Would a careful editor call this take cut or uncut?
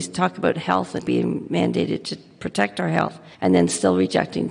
cut